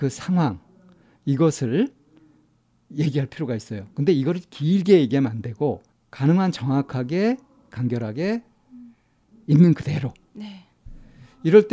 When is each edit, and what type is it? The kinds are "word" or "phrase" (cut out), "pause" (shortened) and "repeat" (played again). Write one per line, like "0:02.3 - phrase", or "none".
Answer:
0:05.9 - pause